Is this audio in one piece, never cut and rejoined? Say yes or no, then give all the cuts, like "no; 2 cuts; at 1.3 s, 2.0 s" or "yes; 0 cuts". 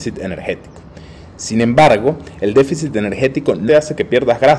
no; 1 cut; at 3.7 s